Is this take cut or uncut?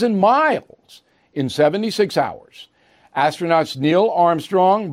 uncut